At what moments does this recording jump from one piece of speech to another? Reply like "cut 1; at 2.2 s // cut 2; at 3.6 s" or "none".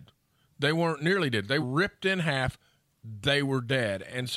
cut 1; at 1.6 s